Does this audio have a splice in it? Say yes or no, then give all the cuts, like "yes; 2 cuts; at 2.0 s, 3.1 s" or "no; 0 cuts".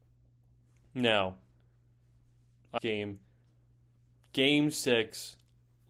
yes; 1 cut; at 2.8 s